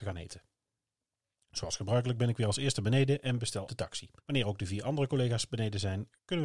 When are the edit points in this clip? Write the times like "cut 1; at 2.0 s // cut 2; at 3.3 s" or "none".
cut 1; at 3.7 s // cut 2; at 4.2 s